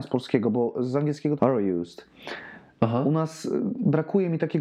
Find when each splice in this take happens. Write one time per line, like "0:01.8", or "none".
0:01.4